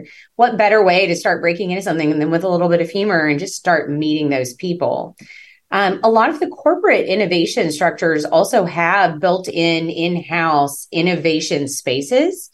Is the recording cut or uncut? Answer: uncut